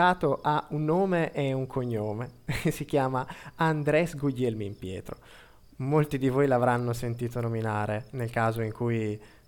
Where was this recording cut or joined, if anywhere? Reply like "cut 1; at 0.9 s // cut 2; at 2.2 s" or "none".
none